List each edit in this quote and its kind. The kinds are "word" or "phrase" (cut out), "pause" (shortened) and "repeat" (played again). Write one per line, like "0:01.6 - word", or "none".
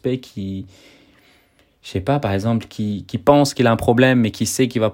none